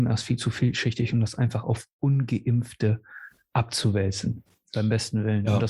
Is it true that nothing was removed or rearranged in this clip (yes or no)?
yes